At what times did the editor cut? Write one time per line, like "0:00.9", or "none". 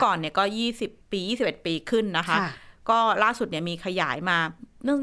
0:01.0